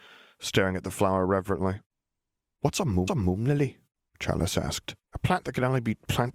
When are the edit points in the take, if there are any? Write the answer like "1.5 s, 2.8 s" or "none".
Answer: 3.1 s, 5.0 s